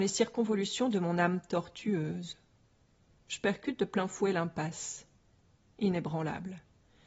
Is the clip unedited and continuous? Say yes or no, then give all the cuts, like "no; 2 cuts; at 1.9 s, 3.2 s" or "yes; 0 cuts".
yes; 0 cuts